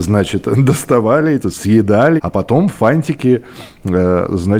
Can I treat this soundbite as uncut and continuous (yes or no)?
no